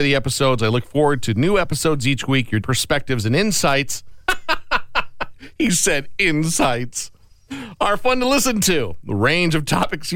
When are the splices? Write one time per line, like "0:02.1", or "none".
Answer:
0:02.6